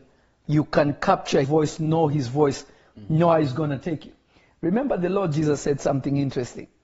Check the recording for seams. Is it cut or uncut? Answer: cut